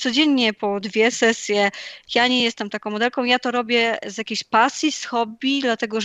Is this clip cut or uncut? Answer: uncut